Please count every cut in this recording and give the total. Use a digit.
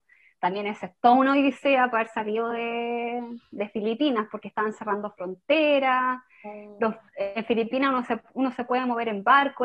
0